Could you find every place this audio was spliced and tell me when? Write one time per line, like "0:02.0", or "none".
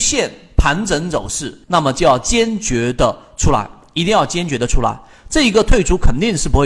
0:01.6

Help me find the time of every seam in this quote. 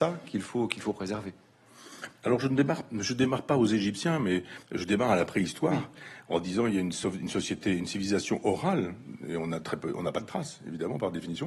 0:04.6

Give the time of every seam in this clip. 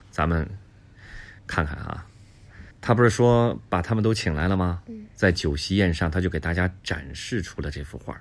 0:01.4
0:02.7

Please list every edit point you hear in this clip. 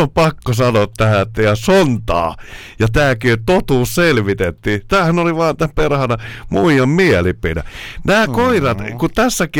none

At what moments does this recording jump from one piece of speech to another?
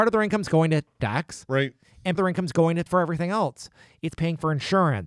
0:01.0
0:02.1
0:02.9

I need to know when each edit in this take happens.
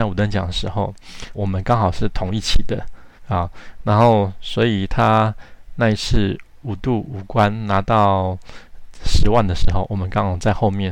0:01.3
0:03.2

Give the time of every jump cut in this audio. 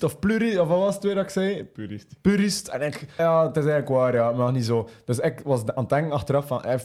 0:03.2

